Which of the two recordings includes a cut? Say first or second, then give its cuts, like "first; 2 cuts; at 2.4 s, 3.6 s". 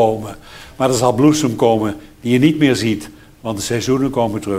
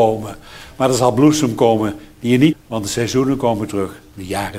second; 1 cut; at 2.5 s